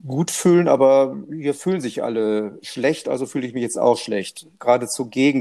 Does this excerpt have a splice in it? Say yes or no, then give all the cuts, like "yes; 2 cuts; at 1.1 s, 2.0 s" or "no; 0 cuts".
no; 0 cuts